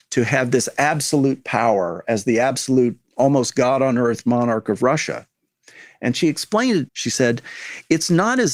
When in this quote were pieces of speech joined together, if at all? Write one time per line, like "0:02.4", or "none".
0:06.9